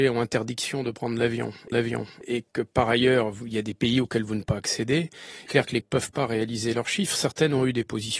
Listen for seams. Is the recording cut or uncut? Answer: cut